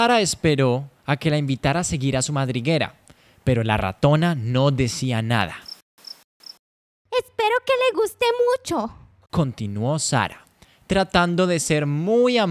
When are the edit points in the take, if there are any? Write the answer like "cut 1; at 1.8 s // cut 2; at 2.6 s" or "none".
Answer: none